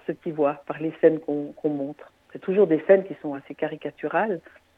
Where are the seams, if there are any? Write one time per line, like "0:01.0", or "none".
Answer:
none